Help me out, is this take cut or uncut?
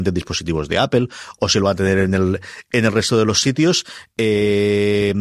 uncut